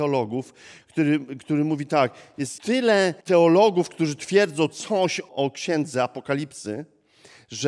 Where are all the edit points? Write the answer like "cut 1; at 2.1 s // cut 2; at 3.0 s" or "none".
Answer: cut 1; at 2.6 s // cut 2; at 3.2 s // cut 3; at 5.3 s

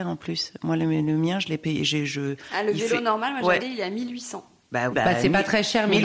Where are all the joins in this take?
cut 1; at 3.6 s // cut 2; at 4.9 s

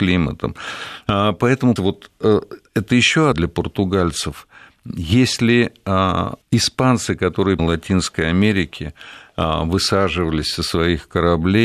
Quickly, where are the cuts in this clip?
cut 1; at 1.8 s // cut 2; at 2.7 s // cut 3; at 3.3 s // cut 4; at 6.4 s // cut 5; at 7.6 s

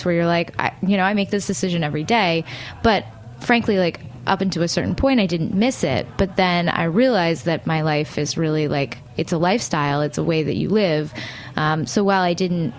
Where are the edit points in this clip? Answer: none

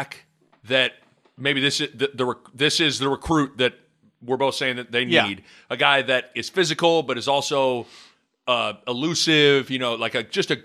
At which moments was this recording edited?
none

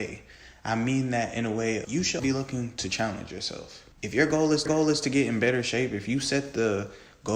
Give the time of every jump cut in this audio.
cut 1; at 1.8 s // cut 2; at 2.2 s // cut 3; at 3.9 s // cut 4; at 4.7 s

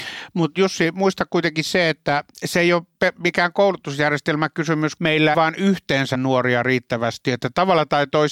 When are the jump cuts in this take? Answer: cut 1; at 5.0 s // cut 2; at 5.3 s // cut 3; at 6.1 s

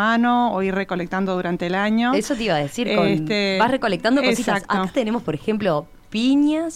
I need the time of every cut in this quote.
none

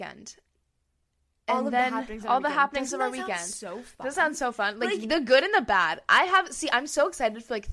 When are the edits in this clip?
none

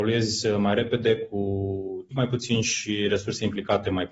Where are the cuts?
cut 1; at 2.1 s

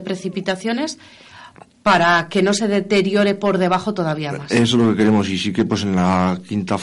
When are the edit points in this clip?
none

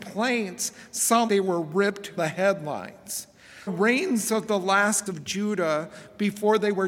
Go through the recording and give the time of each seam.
cut 1; at 1.3 s // cut 2; at 2.2 s // cut 3; at 3.7 s // cut 4; at 5.1 s

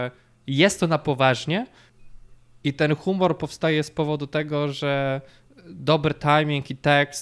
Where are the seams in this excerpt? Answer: none

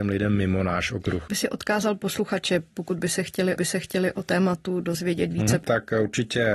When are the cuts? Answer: cut 1; at 1.3 s // cut 2; at 3.6 s

